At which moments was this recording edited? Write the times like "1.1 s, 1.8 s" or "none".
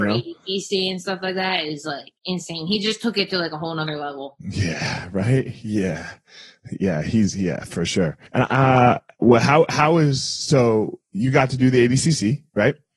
2.2 s, 8.3 s